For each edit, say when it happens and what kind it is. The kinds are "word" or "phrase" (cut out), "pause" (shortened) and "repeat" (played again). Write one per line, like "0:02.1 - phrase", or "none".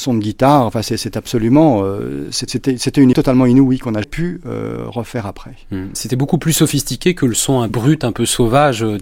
0:02.5 - word
0:03.1 - word
0:04.0 - word
0:07.7 - word